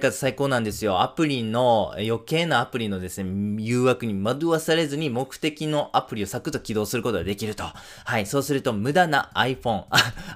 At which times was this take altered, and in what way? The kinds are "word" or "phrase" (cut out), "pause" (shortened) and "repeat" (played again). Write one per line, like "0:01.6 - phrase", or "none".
none